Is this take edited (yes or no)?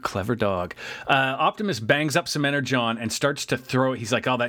no